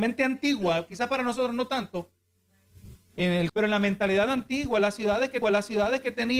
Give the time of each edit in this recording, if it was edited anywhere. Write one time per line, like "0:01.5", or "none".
0:03.5
0:05.4